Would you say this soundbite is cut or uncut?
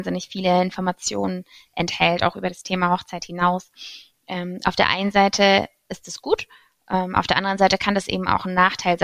uncut